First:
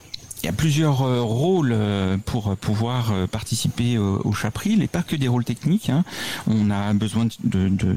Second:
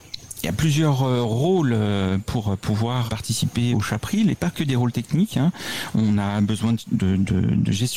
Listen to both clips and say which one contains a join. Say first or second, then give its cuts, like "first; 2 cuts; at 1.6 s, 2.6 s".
second; 2 cuts; at 3.1 s, 3.7 s